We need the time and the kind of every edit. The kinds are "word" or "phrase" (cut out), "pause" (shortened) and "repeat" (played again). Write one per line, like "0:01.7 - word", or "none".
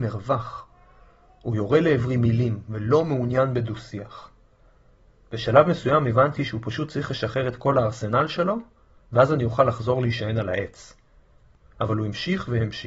none